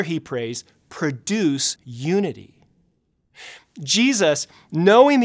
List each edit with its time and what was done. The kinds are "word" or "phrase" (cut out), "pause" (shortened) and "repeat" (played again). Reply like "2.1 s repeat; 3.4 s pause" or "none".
1.8 s word